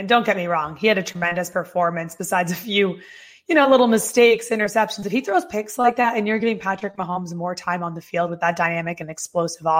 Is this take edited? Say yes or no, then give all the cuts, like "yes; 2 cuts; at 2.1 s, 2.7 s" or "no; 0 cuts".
no; 0 cuts